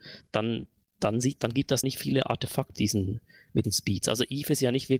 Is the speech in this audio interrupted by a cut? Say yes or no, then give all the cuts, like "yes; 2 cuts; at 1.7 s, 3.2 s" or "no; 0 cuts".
yes; 4 cuts; at 1.4 s, 1.8 s, 2.8 s, 3.6 s